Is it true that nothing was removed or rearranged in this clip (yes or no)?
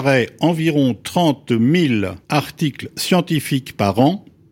no